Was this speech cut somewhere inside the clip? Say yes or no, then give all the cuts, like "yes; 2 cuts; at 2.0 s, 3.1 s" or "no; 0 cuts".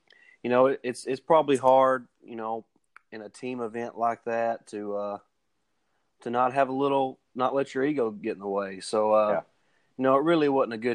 no; 0 cuts